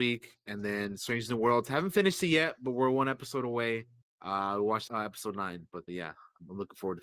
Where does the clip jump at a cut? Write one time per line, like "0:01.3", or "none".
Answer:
0:04.0
0:04.9
0:05.9